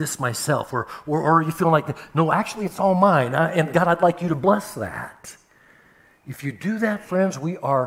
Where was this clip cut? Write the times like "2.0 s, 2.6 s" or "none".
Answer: none

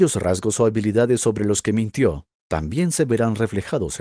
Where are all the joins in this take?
none

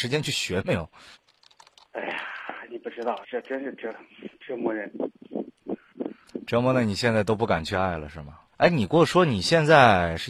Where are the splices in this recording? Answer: 1.1 s, 3.2 s, 8.5 s

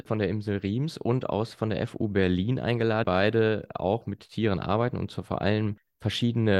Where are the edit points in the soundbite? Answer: 3.0 s

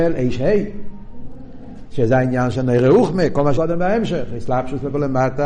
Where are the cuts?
3.6 s

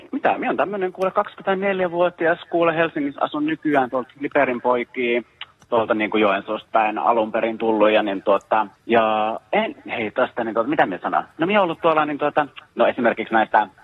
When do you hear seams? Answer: none

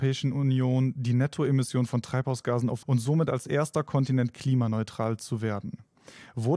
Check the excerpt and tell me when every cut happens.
2.8 s

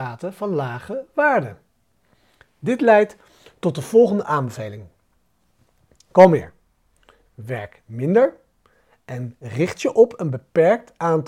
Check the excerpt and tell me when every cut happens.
none

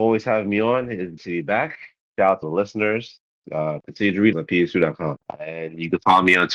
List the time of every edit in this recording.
1.2 s, 2.4 s, 4.3 s, 5.2 s

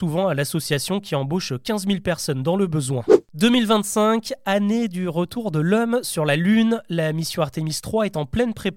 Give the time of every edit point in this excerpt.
none

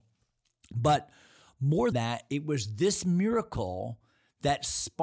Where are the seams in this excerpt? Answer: 1.9 s

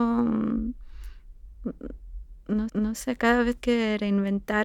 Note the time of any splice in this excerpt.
2.7 s, 3.6 s

